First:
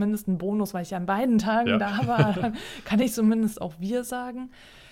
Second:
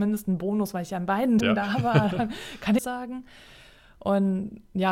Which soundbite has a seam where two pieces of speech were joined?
second; 2 cuts; at 1.4 s, 2.8 s

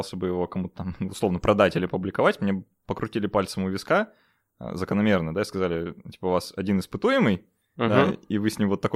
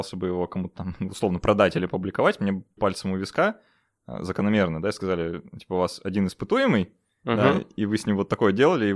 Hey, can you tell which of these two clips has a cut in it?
second; 1 cut; at 2.8 s

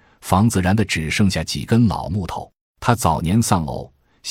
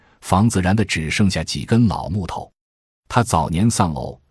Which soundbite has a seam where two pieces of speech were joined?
first; 1 cut; at 2.6 s

